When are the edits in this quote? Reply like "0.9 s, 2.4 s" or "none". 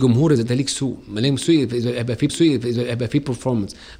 2.3 s